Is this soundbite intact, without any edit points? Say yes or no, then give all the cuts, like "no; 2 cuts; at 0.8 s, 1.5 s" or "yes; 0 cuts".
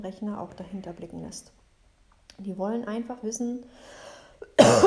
yes; 0 cuts